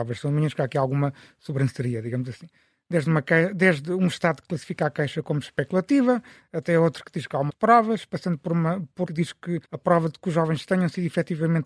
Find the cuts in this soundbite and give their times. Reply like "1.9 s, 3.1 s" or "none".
7.5 s, 9.0 s, 9.6 s